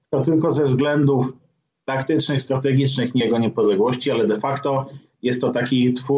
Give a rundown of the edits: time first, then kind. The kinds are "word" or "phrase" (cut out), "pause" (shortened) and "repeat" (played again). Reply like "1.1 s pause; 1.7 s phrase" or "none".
3.2 s word